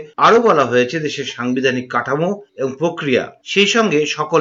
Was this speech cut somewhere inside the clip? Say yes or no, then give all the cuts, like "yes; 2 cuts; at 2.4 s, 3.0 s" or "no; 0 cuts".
no; 0 cuts